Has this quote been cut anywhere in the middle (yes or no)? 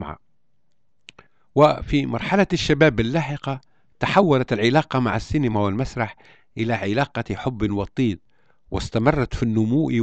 no